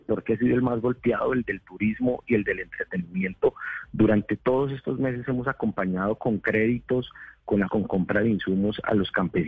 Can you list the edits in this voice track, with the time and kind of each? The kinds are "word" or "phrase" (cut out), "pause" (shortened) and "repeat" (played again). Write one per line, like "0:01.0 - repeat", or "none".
0:07.7 - phrase